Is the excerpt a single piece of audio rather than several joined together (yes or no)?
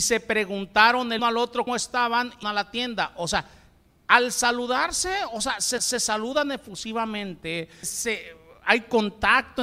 no